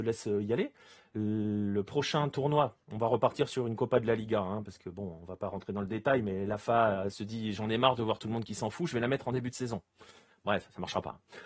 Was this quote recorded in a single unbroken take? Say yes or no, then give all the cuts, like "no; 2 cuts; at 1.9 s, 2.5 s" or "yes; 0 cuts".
yes; 0 cuts